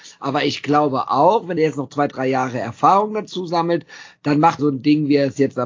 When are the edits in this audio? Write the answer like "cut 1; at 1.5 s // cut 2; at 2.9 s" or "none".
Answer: cut 1; at 1.6 s // cut 2; at 4.6 s